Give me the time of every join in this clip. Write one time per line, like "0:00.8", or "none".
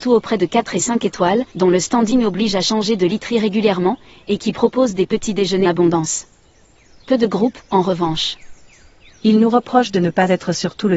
0:01.5
0:05.6